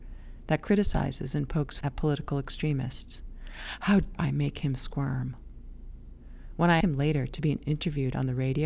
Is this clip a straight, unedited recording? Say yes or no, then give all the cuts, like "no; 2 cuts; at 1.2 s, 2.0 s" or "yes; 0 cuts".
no; 3 cuts; at 1.8 s, 4.1 s, 6.8 s